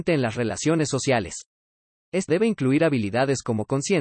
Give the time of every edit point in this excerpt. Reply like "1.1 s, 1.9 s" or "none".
2.3 s